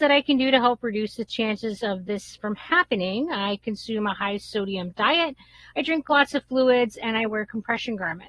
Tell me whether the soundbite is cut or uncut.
uncut